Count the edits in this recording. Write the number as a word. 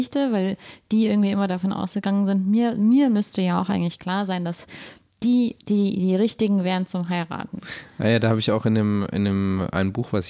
one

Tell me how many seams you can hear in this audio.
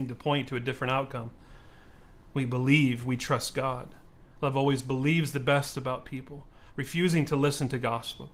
zero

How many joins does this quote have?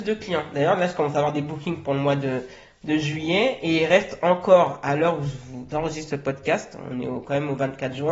zero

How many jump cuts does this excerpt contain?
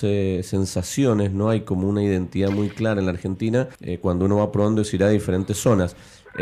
one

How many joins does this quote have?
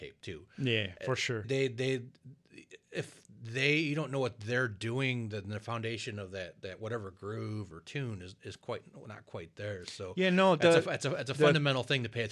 one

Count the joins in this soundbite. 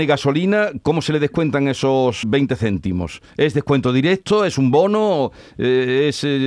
one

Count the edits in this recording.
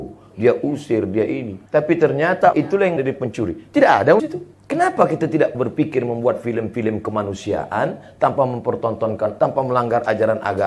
seven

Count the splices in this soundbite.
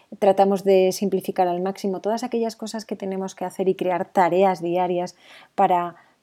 zero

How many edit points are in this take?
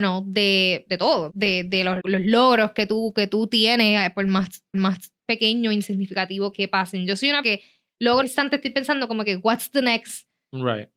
six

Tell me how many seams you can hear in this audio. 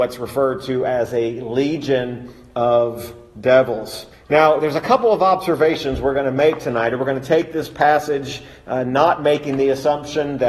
one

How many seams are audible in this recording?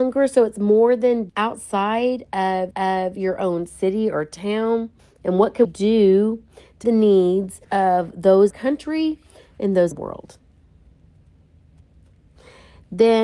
eight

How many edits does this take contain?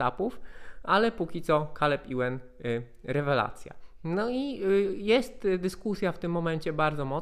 zero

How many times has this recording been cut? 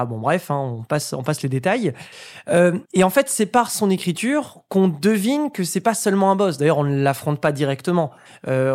one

